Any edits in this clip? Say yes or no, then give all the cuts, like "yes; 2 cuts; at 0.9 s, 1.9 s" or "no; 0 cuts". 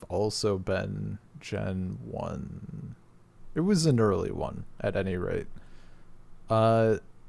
yes; 1 cut; at 1.3 s